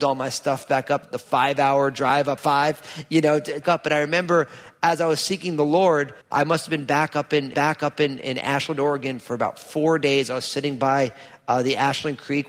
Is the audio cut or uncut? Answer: cut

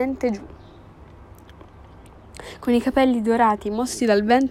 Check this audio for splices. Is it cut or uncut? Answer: uncut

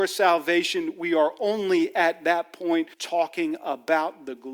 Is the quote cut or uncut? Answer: cut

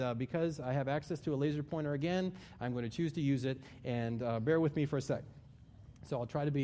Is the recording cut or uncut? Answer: uncut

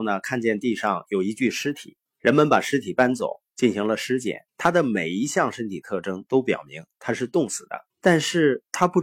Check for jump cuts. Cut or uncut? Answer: cut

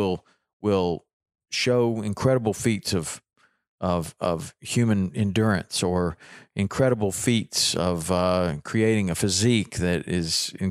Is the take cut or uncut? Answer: uncut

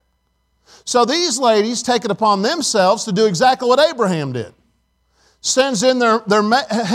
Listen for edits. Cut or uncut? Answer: uncut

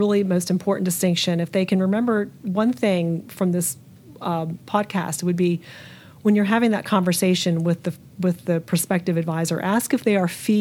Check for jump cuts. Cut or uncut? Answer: uncut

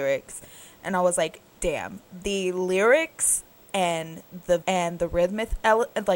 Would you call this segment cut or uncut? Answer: cut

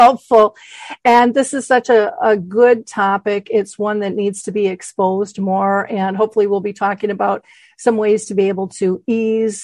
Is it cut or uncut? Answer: uncut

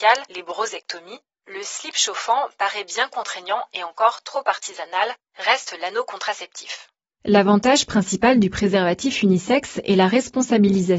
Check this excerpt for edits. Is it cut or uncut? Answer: uncut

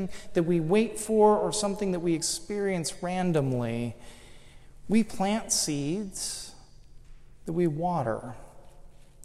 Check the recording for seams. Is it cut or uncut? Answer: uncut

